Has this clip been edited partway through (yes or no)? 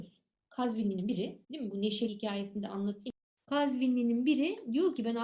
yes